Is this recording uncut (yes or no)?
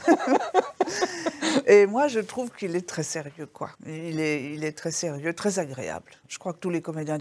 no